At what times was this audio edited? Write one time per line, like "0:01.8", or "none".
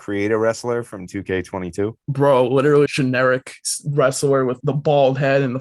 0:01.1
0:02.0
0:02.9
0:04.6